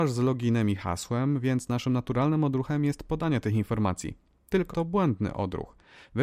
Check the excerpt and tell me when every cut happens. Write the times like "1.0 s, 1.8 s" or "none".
4.7 s

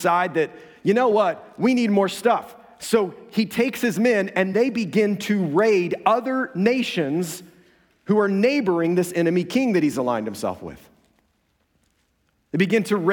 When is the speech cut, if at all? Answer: none

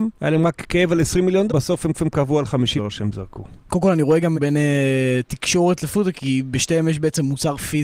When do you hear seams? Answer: 1.5 s, 1.9 s, 2.8 s, 4.3 s, 6.1 s

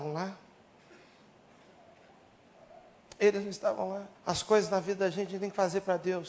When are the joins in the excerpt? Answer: 4.1 s

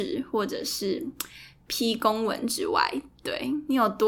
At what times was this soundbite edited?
none

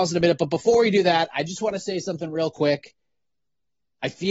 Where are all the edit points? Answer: none

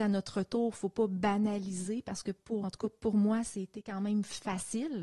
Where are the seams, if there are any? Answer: 2.6 s

